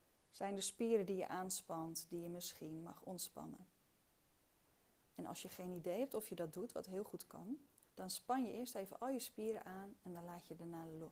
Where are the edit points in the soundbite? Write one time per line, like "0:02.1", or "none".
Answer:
0:07.9